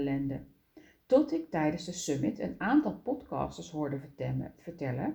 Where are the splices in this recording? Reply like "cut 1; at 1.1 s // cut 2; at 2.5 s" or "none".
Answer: none